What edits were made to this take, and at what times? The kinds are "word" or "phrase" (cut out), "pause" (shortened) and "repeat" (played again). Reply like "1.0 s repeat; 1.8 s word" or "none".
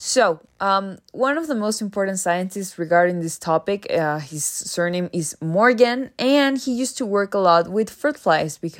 none